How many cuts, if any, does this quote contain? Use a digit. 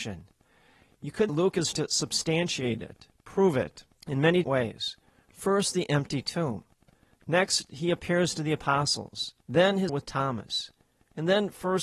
6